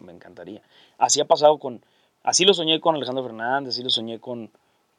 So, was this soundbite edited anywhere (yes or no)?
no